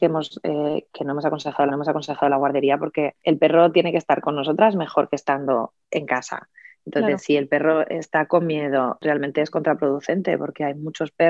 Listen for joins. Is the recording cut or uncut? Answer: cut